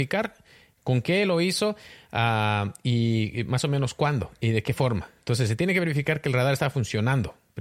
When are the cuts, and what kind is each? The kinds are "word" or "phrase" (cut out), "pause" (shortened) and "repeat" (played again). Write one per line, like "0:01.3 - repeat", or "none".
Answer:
none